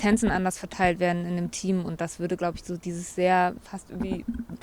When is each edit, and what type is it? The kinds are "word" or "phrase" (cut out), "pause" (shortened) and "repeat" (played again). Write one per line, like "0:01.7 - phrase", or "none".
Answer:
none